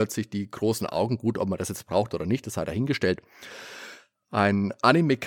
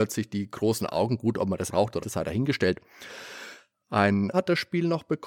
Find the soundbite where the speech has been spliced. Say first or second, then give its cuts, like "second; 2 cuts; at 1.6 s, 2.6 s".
second; 3 cuts; at 1.7 s, 2.0 s, 4.3 s